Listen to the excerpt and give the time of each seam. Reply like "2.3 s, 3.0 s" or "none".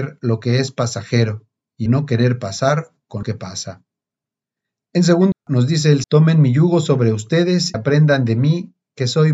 1.9 s, 3.2 s, 5.3 s, 6.0 s, 7.7 s

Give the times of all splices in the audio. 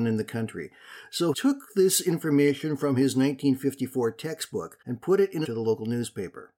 1.3 s, 4.8 s, 5.4 s

